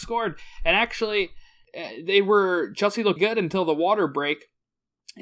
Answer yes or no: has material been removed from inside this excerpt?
yes